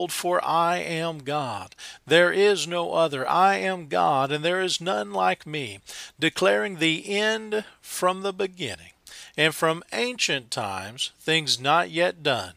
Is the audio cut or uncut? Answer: uncut